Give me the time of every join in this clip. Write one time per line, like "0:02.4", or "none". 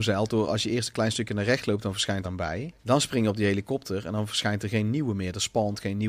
0:02.2
0:02.8